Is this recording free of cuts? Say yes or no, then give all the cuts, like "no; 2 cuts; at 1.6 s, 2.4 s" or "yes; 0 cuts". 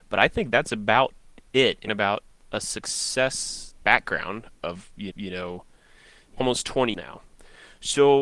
no; 7 cuts; at 1.5 s, 1.9 s, 2.3 s, 3.8 s, 5.1 s, 6.4 s, 6.9 s